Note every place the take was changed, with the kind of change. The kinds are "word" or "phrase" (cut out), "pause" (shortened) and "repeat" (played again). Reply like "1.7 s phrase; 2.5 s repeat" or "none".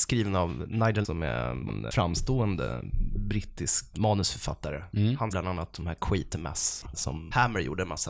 1.0 s word; 1.7 s word; 3.9 s word; 5.3 s word; 6.8 s word